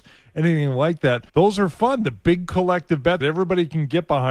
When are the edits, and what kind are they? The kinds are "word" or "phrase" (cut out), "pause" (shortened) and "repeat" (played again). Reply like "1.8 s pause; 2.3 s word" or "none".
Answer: 1.3 s pause; 3.2 s word

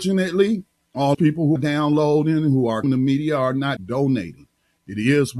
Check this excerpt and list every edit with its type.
1.1 s word; 1.6 s word; 2.8 s word; 3.8 s word

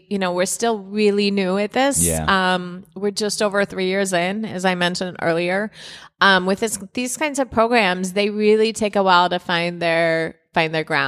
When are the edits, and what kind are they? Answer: none

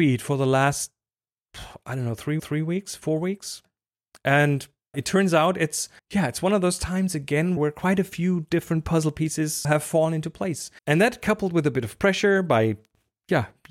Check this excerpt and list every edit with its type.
2.4 s repeat; 4.9 s word; 6.0 s pause; 7.6 s word; 9.6 s word; 10.8 s pause

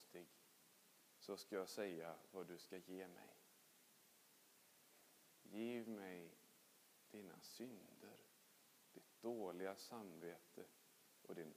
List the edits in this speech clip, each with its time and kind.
none

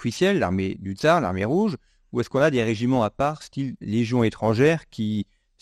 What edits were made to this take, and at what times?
none

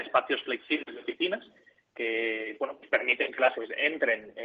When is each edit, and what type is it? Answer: 3.5 s word

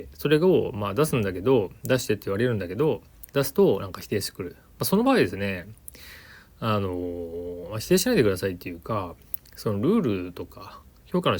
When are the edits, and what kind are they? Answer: 3.3 s pause

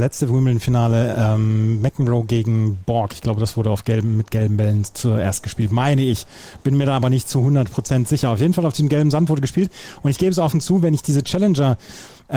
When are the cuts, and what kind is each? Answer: none

